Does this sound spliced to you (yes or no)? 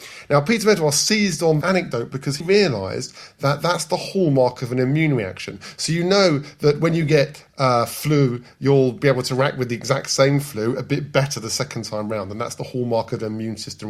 yes